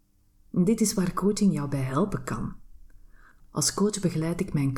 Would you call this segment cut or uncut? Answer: uncut